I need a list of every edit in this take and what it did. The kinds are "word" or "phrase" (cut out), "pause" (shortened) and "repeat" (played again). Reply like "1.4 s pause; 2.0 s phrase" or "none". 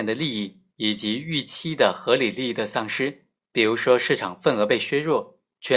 3.4 s pause